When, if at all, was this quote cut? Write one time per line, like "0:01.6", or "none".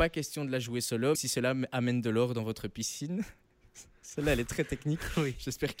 0:01.1